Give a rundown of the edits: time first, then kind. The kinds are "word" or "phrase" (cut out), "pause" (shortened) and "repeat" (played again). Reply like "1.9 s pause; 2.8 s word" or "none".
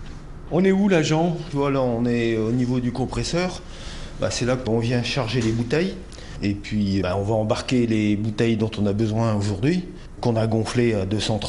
4.7 s word; 7.0 s word; 10.2 s word